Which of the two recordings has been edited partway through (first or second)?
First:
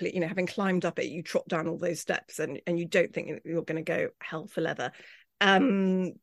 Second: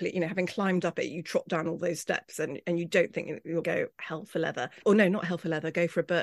second